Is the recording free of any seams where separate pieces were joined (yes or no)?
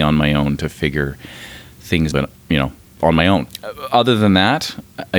no